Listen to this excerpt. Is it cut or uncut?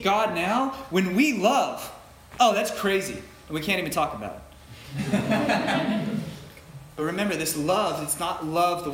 uncut